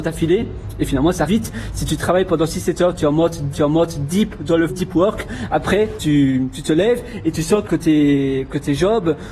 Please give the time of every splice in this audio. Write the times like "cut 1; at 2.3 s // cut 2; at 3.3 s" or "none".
cut 1; at 1.3 s // cut 2; at 3.5 s // cut 3; at 4.7 s // cut 4; at 6.0 s // cut 5; at 7.7 s